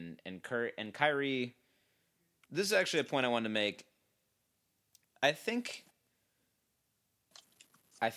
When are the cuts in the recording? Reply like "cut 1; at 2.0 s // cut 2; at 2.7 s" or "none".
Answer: none